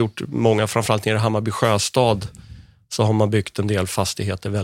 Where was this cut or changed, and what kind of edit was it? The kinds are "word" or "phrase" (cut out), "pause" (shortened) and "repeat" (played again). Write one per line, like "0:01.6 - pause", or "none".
none